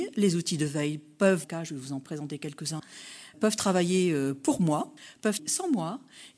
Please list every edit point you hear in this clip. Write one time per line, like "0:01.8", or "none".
0:01.4
0:03.3
0:05.4